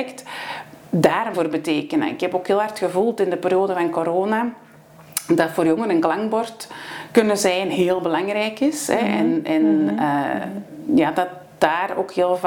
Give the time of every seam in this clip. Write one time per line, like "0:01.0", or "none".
0:01.3

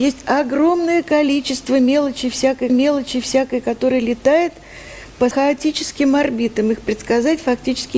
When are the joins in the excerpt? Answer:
0:02.7
0:05.3

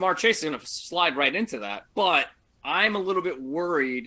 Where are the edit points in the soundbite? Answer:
0:01.9

